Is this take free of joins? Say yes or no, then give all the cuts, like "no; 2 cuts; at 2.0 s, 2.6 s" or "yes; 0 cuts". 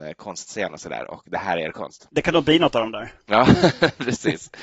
no; 1 cut; at 3.2 s